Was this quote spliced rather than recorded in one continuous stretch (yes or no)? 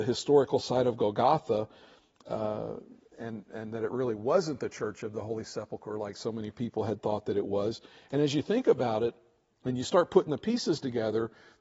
no